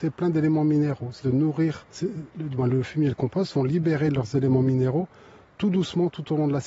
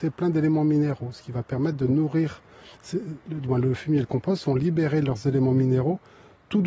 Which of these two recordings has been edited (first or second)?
first